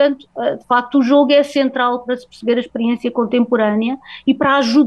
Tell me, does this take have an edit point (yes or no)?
no